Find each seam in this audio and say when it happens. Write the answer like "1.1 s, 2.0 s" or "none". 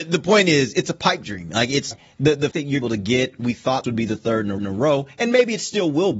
1.9 s, 2.5 s, 2.8 s, 3.8 s, 4.6 s